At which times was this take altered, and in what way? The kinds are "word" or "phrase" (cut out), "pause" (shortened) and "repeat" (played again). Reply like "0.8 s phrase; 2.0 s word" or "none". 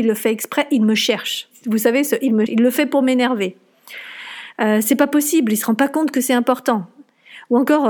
2.5 s word